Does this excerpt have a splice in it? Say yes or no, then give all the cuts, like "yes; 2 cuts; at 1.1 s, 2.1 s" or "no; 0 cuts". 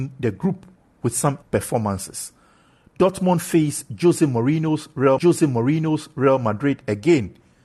yes; 2 cuts; at 1.4 s, 5.2 s